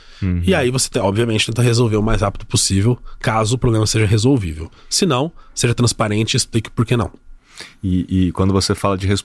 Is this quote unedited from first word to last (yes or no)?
yes